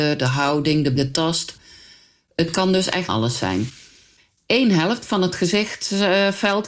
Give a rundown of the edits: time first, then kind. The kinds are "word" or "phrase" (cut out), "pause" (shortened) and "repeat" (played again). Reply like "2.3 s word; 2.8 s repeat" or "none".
1.0 s word; 3.1 s word